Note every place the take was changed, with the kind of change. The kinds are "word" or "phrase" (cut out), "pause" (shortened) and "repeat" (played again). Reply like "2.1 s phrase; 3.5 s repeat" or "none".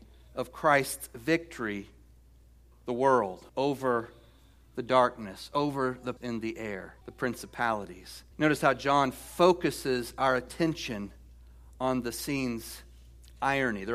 2.7 s word; 3.5 s pause; 6.2 s word; 7.0 s pause; 8.3 s pause